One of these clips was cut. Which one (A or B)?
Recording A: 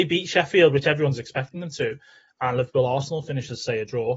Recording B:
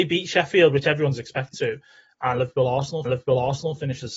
B